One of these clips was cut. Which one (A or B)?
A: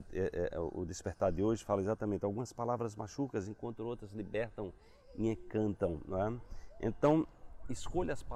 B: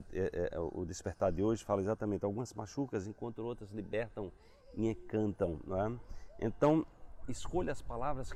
B